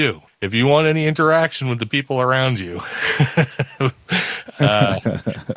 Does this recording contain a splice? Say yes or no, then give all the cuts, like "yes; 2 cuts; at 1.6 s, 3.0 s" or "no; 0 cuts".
no; 0 cuts